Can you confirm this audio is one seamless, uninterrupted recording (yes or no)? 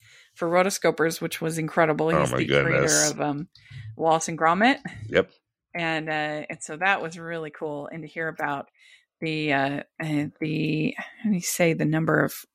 yes